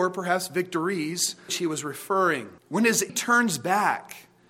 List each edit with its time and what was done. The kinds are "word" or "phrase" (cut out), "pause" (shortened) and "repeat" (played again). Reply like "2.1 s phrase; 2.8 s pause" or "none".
1.5 s phrase; 2.6 s pause; 3.1 s word